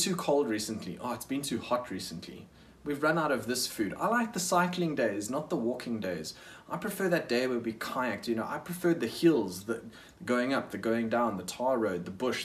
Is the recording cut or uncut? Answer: uncut